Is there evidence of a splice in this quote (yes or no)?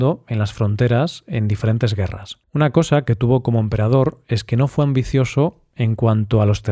yes